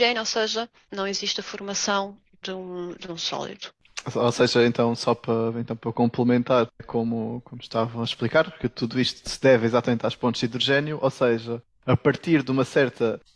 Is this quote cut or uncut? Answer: cut